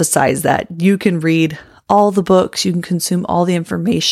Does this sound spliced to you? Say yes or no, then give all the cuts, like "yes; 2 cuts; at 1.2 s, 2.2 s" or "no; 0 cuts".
no; 0 cuts